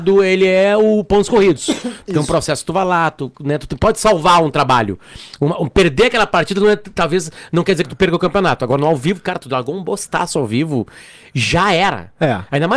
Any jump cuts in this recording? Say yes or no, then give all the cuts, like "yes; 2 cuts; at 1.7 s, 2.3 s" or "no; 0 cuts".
no; 0 cuts